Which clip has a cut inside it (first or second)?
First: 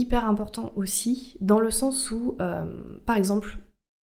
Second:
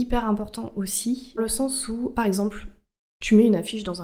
second